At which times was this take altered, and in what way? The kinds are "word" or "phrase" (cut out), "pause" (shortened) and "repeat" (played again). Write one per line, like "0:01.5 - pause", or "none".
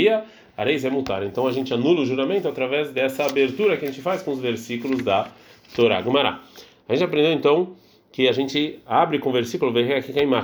none